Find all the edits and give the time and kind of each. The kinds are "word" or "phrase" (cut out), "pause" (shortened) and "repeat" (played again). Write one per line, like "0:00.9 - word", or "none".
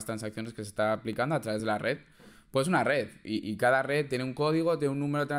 none